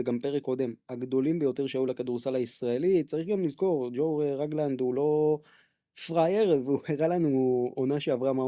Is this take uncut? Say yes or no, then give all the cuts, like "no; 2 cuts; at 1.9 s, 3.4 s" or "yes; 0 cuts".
yes; 0 cuts